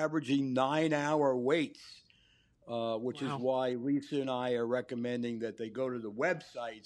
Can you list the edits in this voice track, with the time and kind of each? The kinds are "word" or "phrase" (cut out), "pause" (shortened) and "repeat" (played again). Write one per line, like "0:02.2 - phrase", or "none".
none